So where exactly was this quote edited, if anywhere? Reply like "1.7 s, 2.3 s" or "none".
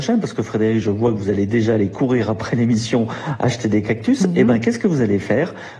none